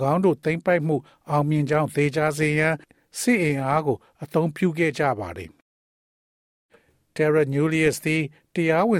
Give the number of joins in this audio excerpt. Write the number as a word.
zero